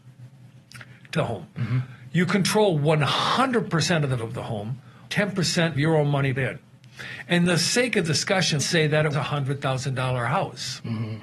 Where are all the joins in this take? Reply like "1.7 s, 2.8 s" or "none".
1.1 s, 4.2 s, 5.1 s, 5.7 s, 6.4 s, 8.0 s, 8.6 s, 9.1 s